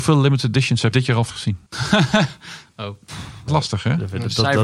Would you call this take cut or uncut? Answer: cut